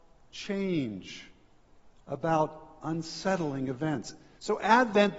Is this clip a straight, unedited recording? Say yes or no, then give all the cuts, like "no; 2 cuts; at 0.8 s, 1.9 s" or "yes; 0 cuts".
yes; 0 cuts